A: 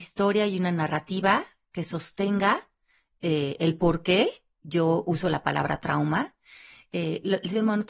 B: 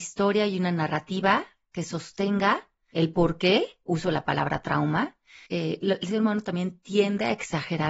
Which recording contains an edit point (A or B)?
B